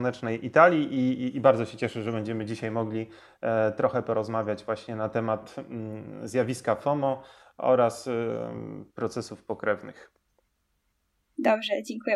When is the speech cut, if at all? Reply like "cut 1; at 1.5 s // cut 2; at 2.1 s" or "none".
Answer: none